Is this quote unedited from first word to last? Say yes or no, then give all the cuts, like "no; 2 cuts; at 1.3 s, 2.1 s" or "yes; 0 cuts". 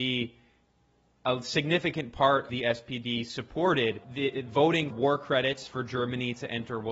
no; 3 cuts; at 2.5 s, 4.0 s, 4.9 s